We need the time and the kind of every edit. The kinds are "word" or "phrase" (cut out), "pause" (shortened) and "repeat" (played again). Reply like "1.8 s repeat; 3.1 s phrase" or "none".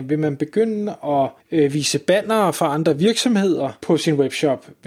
1.4 s pause; 3.8 s pause